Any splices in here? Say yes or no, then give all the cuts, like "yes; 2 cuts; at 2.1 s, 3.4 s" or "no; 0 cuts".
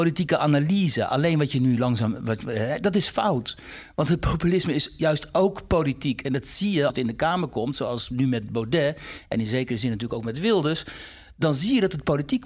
yes; 1 cut; at 6.9 s